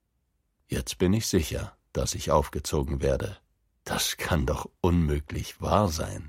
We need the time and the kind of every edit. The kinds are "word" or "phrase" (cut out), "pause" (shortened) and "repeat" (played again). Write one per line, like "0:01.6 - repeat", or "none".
none